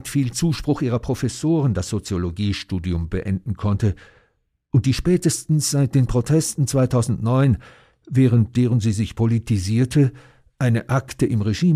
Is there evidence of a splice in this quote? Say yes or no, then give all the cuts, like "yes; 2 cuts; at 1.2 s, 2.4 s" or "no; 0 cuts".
no; 0 cuts